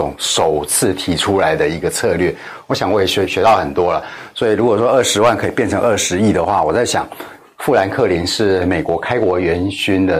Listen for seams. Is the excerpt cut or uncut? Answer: uncut